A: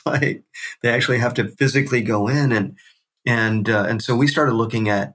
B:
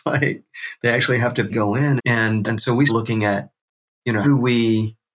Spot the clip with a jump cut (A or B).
B